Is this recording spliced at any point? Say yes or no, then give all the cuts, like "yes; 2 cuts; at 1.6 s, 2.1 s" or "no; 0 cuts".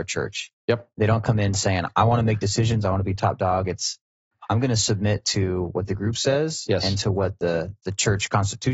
no; 0 cuts